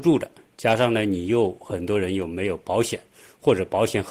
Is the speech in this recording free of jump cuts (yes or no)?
yes